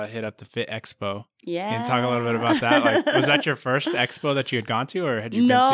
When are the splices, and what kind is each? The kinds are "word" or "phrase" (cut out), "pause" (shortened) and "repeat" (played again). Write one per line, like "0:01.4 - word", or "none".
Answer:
none